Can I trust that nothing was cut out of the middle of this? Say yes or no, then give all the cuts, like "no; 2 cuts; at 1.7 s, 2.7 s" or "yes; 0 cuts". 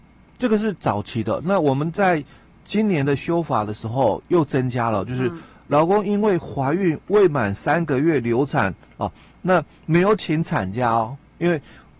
yes; 0 cuts